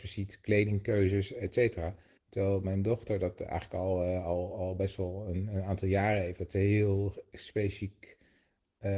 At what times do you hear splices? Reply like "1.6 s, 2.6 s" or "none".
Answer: 2.2 s